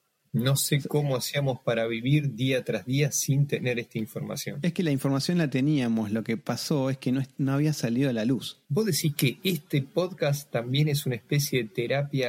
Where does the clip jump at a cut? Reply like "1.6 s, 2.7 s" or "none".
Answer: 8.6 s